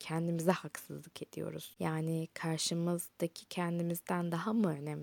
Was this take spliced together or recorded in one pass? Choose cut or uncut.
cut